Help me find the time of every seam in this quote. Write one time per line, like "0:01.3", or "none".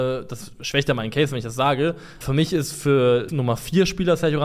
0:02.2
0:03.3